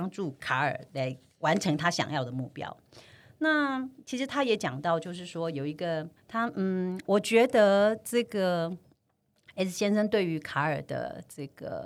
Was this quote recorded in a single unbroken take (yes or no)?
no